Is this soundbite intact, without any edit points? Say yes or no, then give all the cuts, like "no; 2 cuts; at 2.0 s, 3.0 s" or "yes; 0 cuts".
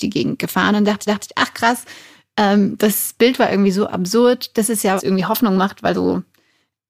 no; 3 cuts; at 1.1 s, 5.0 s, 5.9 s